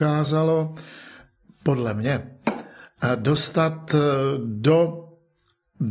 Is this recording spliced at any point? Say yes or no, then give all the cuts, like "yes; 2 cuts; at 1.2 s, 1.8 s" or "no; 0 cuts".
no; 0 cuts